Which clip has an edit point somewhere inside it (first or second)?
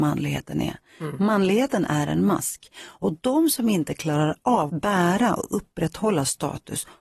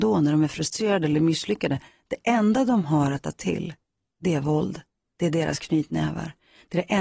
first